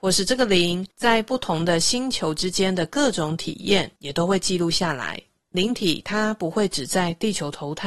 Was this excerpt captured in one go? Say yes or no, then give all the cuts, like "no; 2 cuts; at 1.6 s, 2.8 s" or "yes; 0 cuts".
no; 3 cuts; at 0.9 s, 4.0 s, 5.5 s